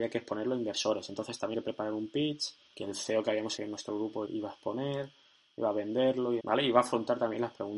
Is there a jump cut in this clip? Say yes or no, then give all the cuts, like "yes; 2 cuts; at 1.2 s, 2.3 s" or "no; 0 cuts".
yes; 5 cuts; at 1.5 s, 2.7 s, 3.6 s, 4.3 s, 6.4 s